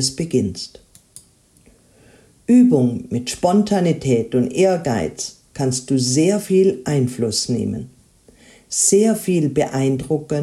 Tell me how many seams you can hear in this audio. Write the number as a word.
zero